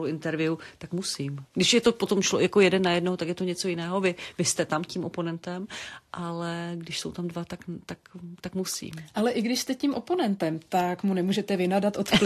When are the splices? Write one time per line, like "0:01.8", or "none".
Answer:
0:01.5